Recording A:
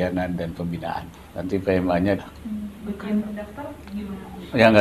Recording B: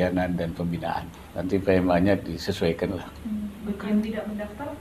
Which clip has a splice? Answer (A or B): A